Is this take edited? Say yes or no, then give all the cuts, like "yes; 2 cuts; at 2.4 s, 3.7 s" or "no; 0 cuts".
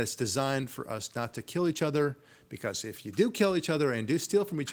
no; 0 cuts